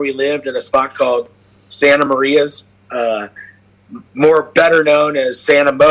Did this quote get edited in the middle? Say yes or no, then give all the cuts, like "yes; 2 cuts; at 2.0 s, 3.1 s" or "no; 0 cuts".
no; 0 cuts